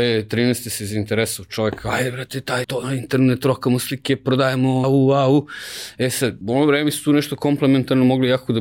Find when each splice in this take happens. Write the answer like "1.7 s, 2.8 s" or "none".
2.6 s, 4.8 s, 6.4 s